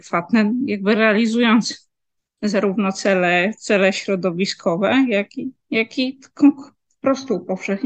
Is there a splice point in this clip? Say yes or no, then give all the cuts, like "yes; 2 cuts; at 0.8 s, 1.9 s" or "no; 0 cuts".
no; 0 cuts